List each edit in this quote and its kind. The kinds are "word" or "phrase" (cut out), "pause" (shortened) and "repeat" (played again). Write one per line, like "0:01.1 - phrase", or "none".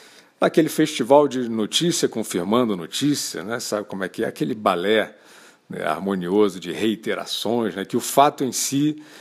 none